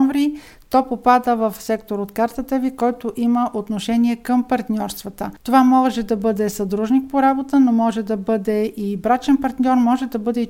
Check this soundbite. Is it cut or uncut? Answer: uncut